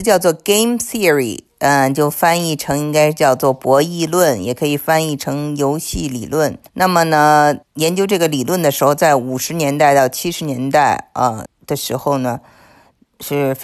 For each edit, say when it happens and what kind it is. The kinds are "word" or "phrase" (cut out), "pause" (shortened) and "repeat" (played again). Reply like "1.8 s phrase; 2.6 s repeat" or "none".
6.7 s pause; 7.6 s pause; 11.5 s word